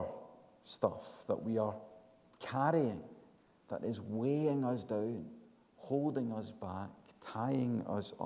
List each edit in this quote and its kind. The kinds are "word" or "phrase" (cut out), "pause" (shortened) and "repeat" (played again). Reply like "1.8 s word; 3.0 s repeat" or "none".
none